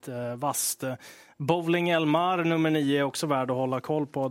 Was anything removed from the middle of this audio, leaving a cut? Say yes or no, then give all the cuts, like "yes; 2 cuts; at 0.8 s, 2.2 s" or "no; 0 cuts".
no; 0 cuts